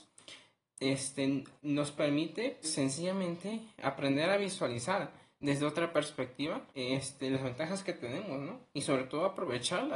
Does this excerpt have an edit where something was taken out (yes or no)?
yes